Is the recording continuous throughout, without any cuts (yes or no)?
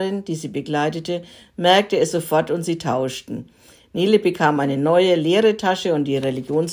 yes